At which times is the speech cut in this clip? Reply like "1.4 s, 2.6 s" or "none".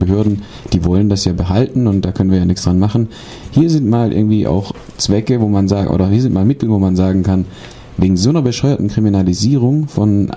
none